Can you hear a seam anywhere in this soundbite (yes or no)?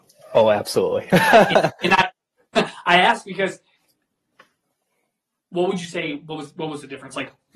no